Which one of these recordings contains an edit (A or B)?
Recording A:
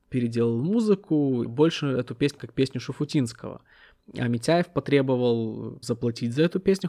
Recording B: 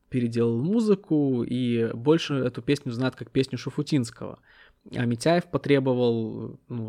A